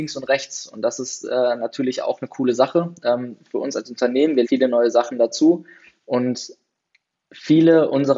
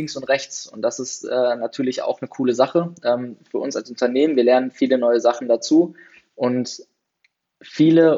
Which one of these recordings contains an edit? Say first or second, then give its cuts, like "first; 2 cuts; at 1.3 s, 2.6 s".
first; 1 cut; at 4.4 s